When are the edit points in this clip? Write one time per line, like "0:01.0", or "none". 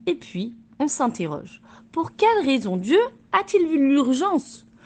none